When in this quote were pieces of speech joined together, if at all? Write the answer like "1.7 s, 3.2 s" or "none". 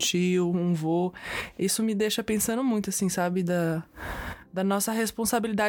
none